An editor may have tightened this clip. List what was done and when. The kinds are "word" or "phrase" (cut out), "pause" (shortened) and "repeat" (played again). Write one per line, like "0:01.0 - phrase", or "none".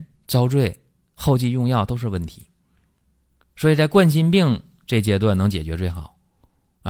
none